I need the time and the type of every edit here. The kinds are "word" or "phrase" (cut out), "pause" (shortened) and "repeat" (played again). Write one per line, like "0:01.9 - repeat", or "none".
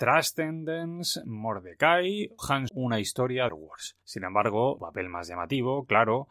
0:02.4 - word
0:02.7 - word
0:03.5 - phrase
0:04.0 - pause
0:04.8 - word